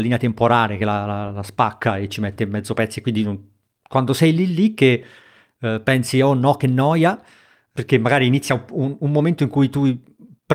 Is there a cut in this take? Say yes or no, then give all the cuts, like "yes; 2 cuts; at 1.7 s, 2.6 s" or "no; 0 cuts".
no; 0 cuts